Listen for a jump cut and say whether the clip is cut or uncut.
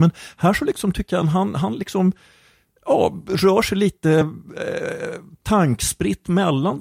uncut